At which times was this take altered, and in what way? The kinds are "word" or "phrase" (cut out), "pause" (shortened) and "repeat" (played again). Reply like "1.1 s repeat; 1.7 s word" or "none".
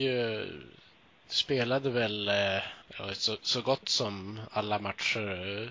2.8 s pause